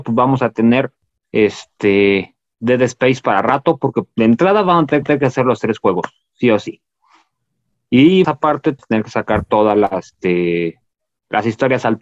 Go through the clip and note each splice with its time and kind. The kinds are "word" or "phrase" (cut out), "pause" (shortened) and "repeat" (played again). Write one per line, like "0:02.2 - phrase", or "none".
0:05.0 - repeat
0:08.2 - word
0:08.8 - phrase